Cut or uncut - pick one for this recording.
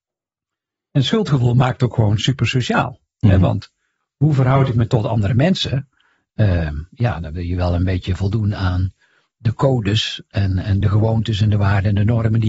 uncut